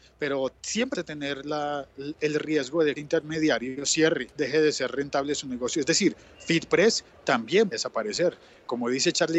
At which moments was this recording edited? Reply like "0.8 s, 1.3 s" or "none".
0.9 s, 3.0 s, 4.3 s, 7.7 s